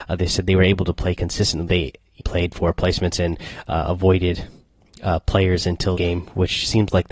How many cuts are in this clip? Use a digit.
3